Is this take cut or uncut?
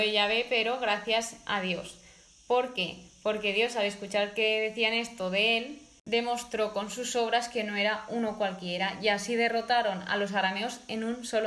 uncut